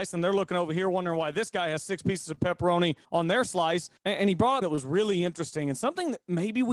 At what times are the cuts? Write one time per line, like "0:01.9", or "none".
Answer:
0:03.0
0:04.0
0:04.6